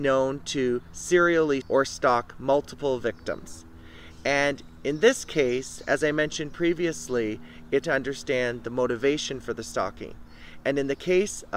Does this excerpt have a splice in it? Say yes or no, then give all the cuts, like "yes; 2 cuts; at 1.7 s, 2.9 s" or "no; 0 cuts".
yes; 2 cuts; at 1.6 s, 7.8 s